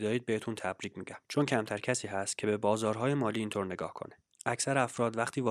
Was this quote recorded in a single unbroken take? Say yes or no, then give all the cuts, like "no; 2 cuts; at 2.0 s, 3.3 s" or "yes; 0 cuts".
no; 1 cut; at 1.2 s